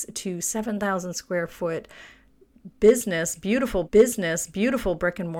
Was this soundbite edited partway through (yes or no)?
yes